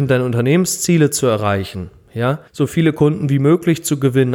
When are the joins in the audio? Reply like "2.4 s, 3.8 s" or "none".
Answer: 2.5 s